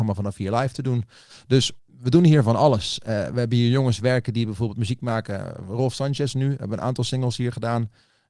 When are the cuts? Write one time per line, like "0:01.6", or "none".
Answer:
0:01.8